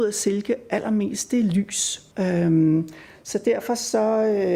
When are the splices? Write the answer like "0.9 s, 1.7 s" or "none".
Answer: 2.1 s